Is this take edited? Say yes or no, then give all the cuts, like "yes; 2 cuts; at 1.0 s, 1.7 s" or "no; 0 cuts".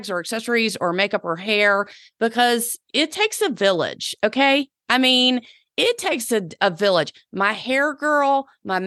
no; 0 cuts